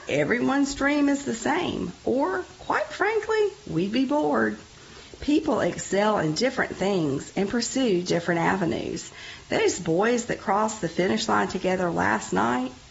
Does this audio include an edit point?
no; 0 cuts

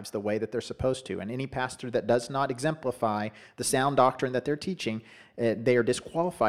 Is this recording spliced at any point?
no; 0 cuts

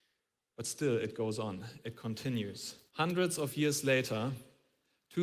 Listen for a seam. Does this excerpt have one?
yes; 1 cut; at 2.9 s

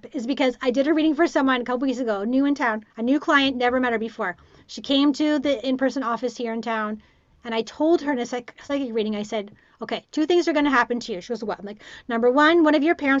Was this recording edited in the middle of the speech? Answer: yes; 1 cut; at 2.9 s

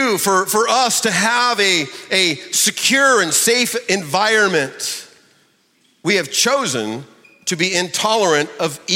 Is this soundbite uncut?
yes; 0 cuts

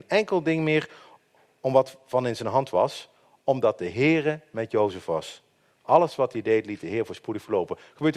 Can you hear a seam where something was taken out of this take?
no; 0 cuts

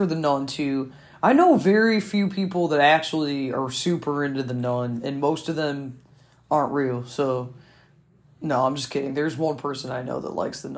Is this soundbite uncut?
yes; 0 cuts

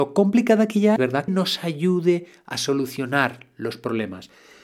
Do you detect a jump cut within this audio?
yes; 2 cuts; at 1.0 s, 1.3 s

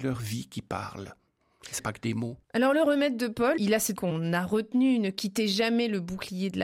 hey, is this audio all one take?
no; 4 cuts; at 1.8 s, 2.4 s, 3.6 s, 4.0 s

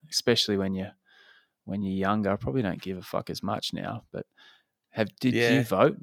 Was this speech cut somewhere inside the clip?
no; 0 cuts

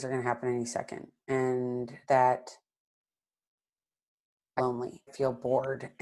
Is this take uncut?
no; 3 cuts; at 2.0 s, 4.6 s, 5.1 s

